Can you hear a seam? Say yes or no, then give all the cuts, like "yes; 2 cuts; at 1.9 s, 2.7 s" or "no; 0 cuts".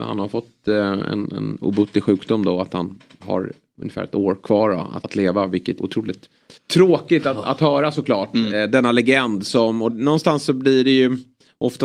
yes; 4 cuts; at 5.0 s, 5.8 s, 6.6 s, 9.9 s